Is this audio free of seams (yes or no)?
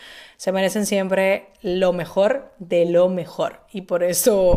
yes